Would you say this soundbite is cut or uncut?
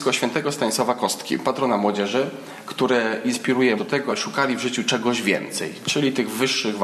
cut